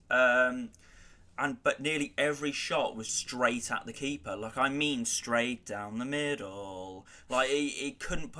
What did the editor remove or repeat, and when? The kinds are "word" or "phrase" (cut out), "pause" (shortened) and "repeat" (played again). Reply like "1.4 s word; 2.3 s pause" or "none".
3.1 s word